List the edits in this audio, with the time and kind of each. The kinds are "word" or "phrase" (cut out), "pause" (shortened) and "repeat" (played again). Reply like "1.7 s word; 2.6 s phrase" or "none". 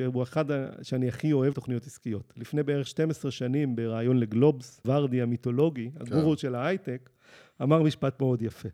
1.5 s word; 4.8 s word